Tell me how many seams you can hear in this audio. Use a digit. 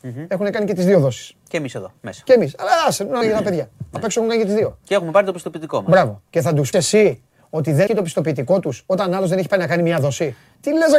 5